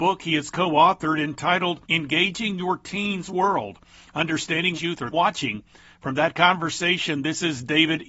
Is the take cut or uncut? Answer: cut